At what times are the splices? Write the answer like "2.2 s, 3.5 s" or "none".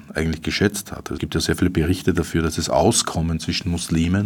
1.2 s